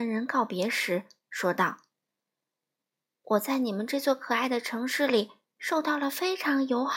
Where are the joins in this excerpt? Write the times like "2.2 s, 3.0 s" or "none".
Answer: none